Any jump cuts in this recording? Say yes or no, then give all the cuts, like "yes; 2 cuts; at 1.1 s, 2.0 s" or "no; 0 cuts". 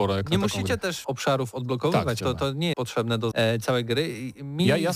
yes; 4 cuts; at 1.0 s, 2.2 s, 2.7 s, 3.3 s